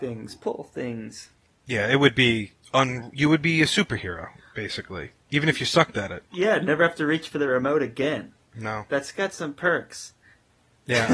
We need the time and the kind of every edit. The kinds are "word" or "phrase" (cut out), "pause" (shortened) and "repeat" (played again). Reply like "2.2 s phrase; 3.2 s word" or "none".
none